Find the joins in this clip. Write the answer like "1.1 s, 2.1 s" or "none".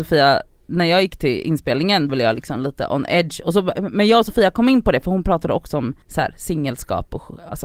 2.1 s, 6.0 s